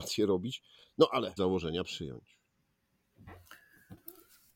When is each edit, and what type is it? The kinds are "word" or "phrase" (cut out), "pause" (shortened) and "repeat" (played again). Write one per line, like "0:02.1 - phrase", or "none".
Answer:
0:01.4 - phrase